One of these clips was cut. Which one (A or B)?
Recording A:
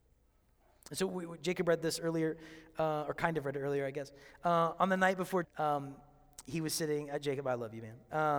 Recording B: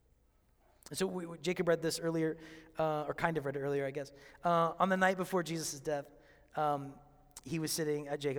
A